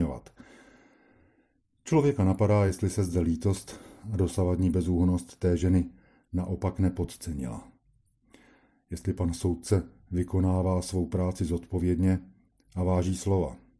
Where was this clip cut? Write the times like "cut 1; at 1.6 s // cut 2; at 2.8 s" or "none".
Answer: none